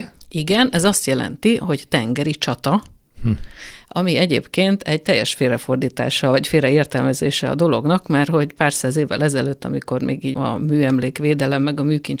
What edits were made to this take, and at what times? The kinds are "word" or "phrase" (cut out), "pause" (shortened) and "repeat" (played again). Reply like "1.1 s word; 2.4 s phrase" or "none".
3.1 s pause; 10.3 s word